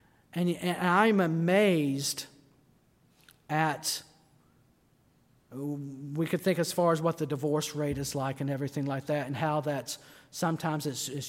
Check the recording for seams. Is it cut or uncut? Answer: uncut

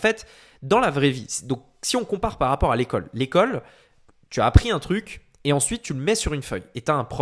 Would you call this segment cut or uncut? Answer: uncut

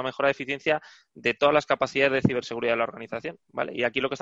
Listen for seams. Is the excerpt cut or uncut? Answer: uncut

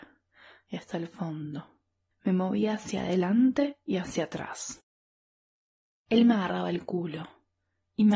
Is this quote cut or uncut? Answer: uncut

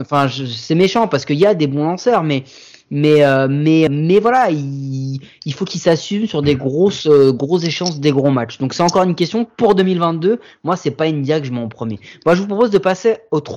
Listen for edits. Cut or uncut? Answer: cut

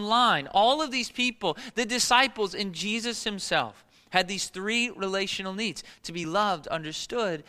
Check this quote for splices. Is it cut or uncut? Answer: uncut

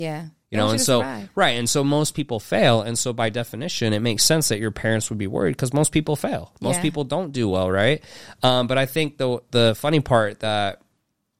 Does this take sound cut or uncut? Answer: uncut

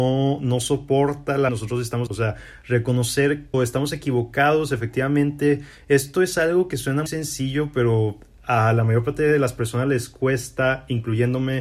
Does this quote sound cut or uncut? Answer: cut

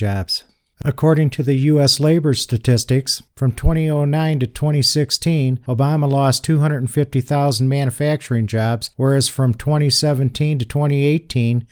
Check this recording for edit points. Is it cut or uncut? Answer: uncut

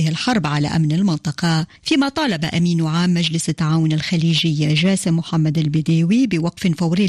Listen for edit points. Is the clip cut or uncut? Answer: cut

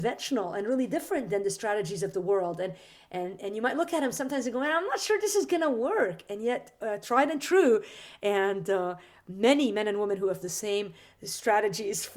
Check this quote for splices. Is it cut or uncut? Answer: cut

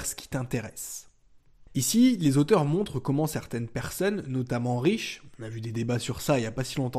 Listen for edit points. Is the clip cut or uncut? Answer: uncut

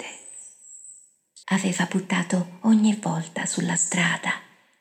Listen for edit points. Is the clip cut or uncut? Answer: cut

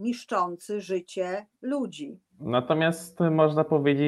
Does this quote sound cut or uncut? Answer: cut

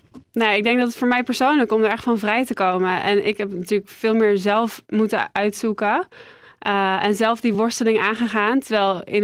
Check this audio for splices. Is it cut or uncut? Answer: uncut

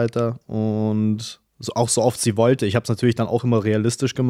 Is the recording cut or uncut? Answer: cut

